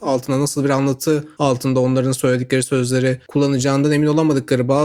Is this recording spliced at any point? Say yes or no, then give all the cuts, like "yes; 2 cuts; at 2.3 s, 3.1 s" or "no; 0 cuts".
no; 0 cuts